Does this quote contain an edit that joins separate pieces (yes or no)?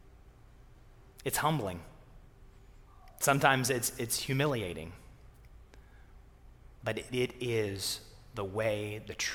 yes